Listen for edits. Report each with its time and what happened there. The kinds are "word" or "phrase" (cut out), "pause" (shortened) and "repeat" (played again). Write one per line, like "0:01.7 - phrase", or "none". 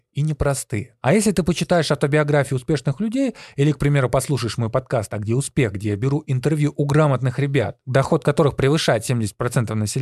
none